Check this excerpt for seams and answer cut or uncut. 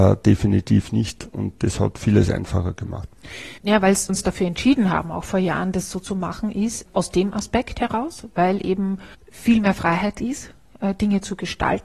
cut